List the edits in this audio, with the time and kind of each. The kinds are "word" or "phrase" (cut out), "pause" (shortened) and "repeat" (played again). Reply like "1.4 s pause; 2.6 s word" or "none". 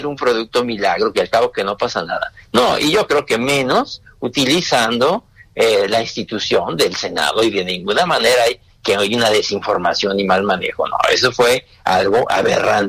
none